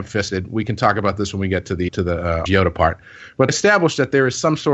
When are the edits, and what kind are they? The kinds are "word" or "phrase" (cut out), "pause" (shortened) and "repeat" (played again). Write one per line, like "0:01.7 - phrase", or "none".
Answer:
0:01.9 - word
0:02.5 - word
0:03.5 - word